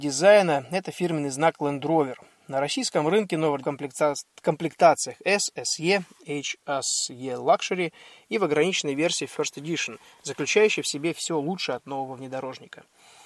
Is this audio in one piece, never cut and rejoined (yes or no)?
no